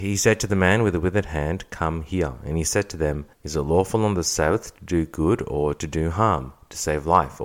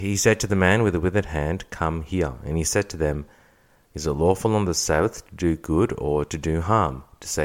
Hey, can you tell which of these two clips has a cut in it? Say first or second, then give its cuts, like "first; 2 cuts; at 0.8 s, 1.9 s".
first; 1 cut; at 3.3 s